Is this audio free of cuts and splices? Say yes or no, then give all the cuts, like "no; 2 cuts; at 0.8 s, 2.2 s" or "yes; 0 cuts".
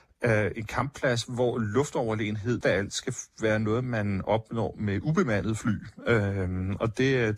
no; 1 cut; at 2.6 s